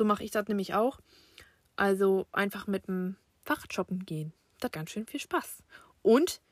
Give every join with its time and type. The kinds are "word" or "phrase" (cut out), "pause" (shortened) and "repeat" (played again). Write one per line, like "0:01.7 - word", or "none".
0:04.7 - word